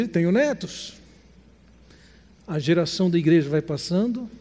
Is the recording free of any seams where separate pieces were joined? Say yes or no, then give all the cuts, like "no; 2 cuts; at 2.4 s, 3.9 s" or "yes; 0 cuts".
yes; 0 cuts